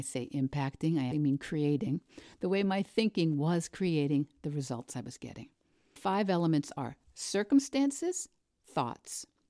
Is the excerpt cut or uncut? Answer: cut